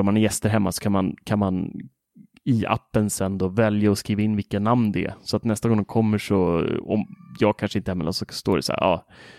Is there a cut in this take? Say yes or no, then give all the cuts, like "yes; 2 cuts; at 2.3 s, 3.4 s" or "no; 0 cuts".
no; 0 cuts